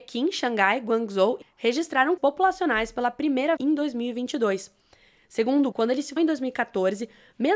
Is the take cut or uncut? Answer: cut